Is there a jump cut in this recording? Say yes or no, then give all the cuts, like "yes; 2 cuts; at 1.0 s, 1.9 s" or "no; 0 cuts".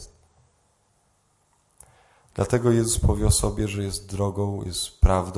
no; 0 cuts